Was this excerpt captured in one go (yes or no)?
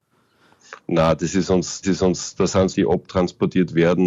no